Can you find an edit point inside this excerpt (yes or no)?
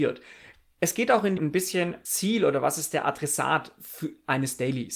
yes